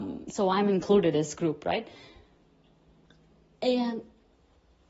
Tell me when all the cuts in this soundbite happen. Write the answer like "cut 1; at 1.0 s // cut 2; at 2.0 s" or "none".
cut 1; at 1.1 s